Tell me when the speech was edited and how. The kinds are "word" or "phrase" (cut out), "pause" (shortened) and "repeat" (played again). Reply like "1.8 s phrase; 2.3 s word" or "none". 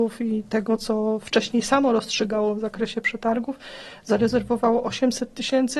none